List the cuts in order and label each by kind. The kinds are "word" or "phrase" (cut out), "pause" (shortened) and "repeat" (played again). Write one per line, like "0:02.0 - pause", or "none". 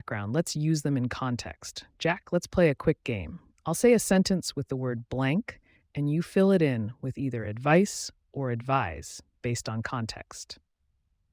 none